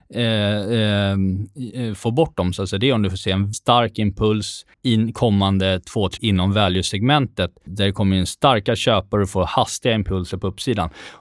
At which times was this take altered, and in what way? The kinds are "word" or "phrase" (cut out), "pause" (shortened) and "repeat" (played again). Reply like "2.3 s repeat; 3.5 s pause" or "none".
3.5 s word; 4.7 s pause; 6.2 s word; 7.7 s word

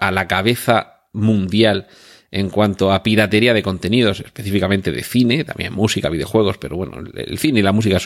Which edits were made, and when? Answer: none

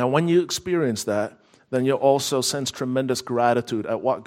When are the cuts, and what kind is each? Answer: none

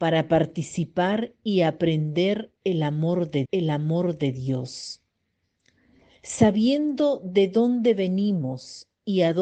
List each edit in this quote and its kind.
3.5 s repeat

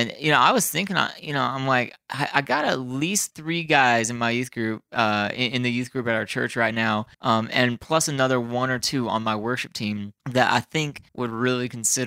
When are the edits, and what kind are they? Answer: 7.1 s pause; 10.2 s pause; 11.1 s pause

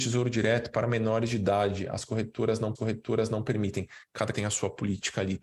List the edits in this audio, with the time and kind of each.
2.7 s repeat; 4.3 s word

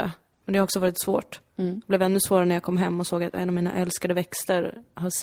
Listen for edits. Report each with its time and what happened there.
none

